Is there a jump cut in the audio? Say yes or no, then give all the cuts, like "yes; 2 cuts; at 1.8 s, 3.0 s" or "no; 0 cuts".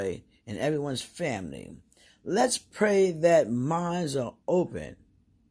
no; 0 cuts